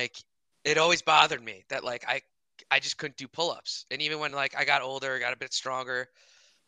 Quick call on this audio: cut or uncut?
uncut